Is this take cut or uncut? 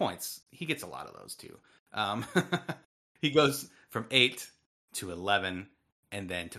uncut